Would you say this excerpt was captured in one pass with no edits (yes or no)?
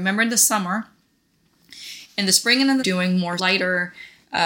no